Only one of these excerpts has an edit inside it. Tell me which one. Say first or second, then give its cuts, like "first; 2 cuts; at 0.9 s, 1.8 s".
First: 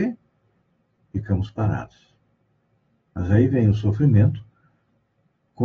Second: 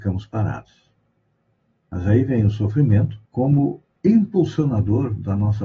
second; 1 cut; at 3.2 s